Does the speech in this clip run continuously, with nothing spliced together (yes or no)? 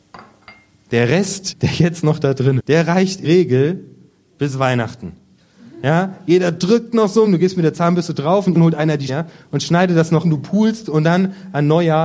no